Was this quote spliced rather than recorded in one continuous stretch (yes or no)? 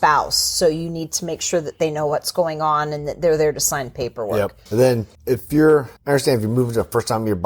yes